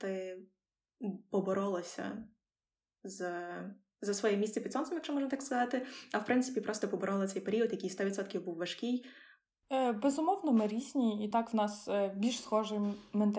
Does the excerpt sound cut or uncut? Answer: uncut